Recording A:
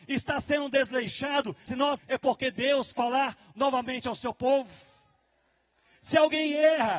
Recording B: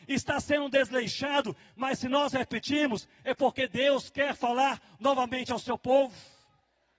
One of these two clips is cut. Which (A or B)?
A